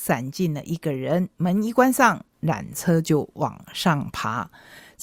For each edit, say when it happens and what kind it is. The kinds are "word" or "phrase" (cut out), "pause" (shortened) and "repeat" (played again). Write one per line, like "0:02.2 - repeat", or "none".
0:01.3 - pause
0:02.3 - pause